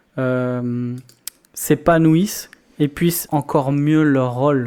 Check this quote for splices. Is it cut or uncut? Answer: cut